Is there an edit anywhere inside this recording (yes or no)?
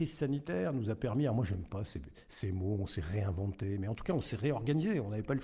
no